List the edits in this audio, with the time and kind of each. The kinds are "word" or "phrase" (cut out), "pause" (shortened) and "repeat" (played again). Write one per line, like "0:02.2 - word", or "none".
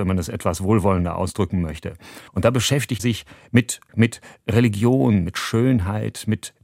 0:02.3 - pause
0:03.0 - word
0:03.9 - word